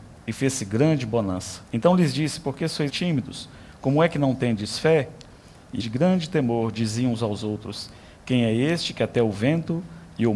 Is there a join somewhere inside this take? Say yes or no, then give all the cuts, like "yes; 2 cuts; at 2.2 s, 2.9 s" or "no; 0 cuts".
yes; 3 cuts; at 1.7 s, 2.9 s, 5.8 s